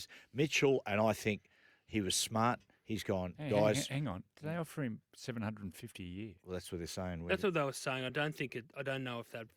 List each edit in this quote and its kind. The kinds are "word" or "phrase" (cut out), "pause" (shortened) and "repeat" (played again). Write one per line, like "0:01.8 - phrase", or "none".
none